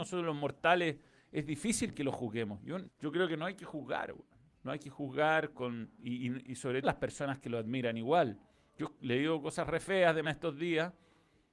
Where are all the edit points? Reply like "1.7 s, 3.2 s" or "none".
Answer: 2.8 s, 5.5 s, 6.8 s, 10.2 s